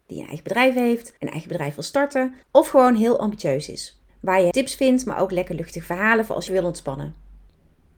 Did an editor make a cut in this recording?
yes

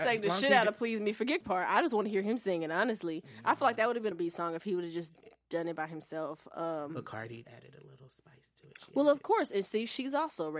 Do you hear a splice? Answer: yes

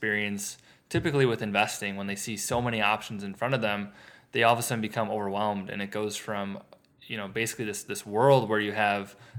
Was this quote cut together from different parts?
no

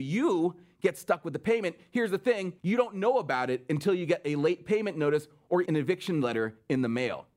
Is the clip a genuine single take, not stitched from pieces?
no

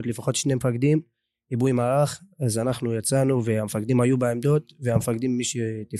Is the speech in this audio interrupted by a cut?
no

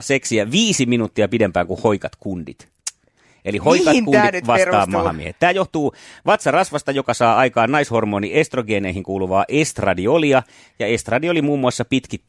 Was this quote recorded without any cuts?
yes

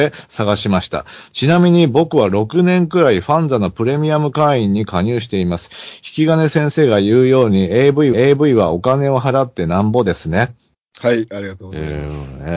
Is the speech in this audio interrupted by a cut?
yes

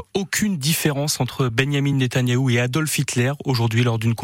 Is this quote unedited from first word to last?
yes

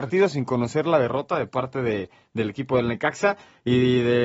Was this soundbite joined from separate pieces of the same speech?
no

